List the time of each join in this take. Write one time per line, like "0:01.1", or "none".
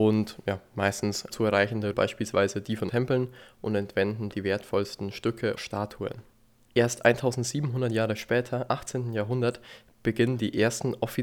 0:01.3
0:01.9
0:02.9
0:04.3
0:05.6
0:08.7

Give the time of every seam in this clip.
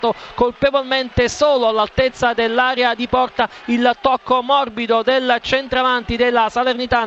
none

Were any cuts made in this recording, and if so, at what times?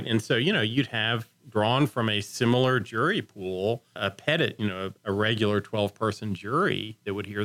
0:04.0

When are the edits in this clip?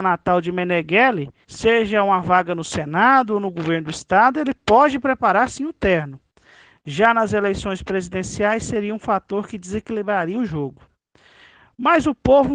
0:01.4

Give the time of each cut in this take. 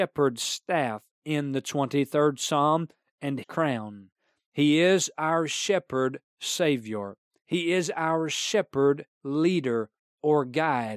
0:01.1
0:03.4
0:06.3
0:09.1

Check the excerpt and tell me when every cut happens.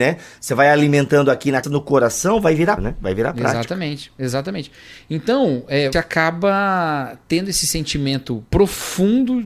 0:01.6
0:02.8
0:05.9
0:08.5

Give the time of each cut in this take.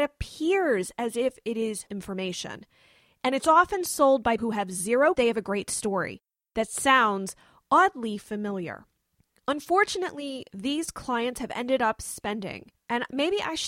0:01.9
0:04.4
0:05.1

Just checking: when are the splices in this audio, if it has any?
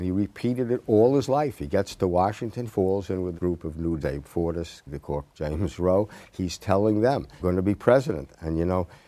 0:02.7
0:03.4
0:04.0
0:04.9
0:05.3
0:07.4

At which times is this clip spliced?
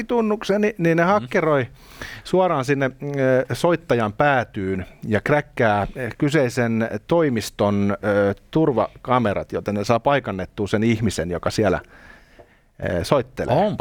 none

